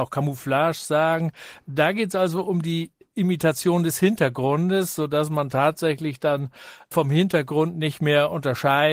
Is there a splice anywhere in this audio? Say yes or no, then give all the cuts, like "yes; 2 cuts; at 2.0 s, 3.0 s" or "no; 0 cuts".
no; 0 cuts